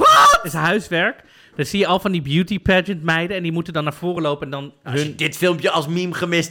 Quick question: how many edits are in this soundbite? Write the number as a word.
zero